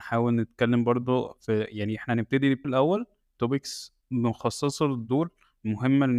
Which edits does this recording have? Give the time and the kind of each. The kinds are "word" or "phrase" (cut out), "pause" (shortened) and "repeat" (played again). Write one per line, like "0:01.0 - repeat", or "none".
0:02.6 - word
0:04.0 - pause